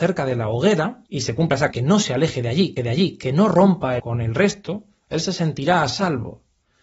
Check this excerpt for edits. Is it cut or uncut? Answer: cut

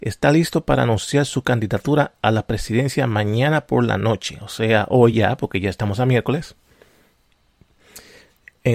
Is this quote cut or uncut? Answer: uncut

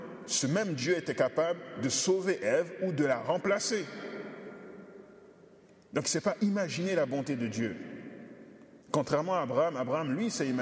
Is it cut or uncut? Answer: cut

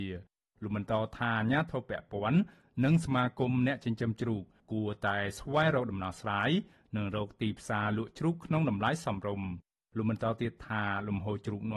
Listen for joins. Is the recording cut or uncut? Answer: uncut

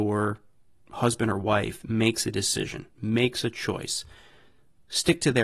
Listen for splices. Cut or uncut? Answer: cut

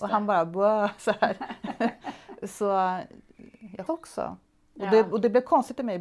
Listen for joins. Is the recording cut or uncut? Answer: cut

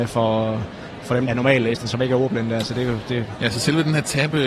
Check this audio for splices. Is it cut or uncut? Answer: cut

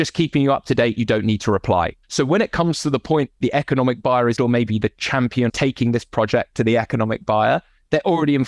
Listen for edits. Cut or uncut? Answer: cut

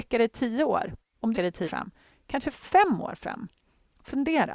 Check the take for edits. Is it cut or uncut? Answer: cut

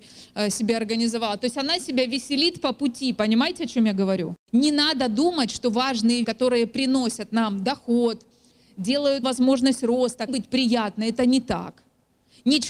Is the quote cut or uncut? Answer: cut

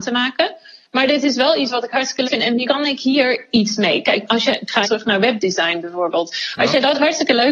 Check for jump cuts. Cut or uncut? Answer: cut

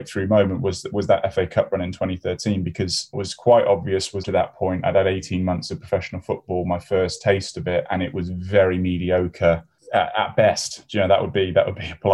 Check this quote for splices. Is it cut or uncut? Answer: cut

